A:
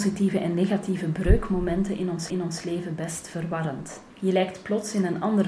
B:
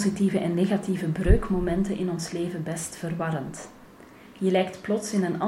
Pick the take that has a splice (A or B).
A